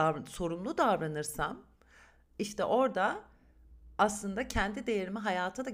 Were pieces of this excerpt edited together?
no; 0 cuts

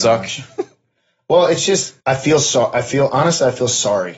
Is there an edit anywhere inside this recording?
yes; 1 cut; at 2.0 s

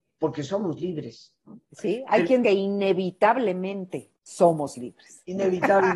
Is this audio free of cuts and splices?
no; 2 cuts; at 2.4 s, 4.2 s

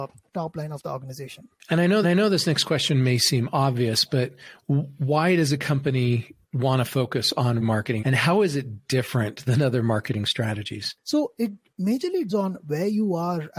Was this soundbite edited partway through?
yes; 5 cuts; at 2.0 s, 6.4 s, 7.6 s, 8.0 s, 12.3 s

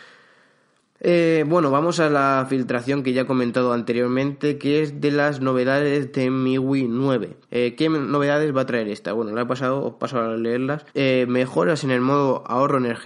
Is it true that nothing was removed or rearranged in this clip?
no; 2 cuts; at 7.4 s, 10.9 s

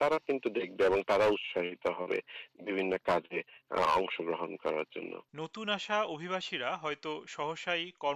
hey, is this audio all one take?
no; 1 cut; at 5.3 s

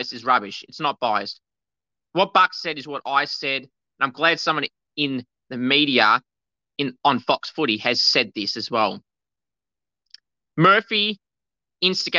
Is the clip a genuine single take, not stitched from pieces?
yes; 0 cuts

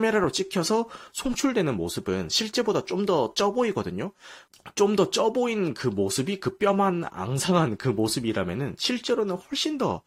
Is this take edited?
no; 0 cuts

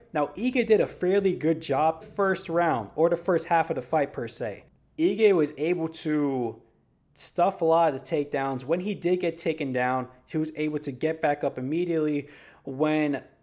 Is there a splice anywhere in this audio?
yes; 1 cut; at 2.0 s

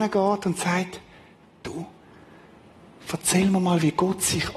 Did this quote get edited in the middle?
no; 0 cuts

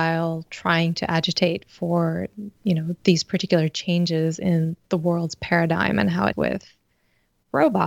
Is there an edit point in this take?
yes; 2 cuts; at 4.8 s, 6.3 s

